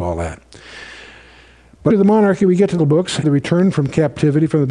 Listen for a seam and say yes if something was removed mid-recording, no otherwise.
yes